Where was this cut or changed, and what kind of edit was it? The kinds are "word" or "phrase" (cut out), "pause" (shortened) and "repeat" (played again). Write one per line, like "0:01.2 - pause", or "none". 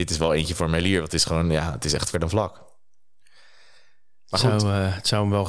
0:02.1 - word